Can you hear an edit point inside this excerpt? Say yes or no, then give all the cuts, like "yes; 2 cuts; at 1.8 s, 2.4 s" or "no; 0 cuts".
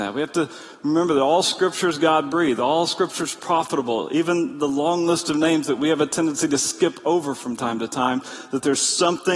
no; 0 cuts